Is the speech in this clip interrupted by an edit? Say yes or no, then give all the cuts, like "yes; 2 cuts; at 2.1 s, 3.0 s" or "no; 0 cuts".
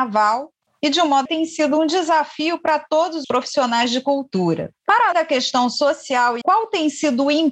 yes; 4 cuts; at 1.3 s, 3.2 s, 5.1 s, 6.4 s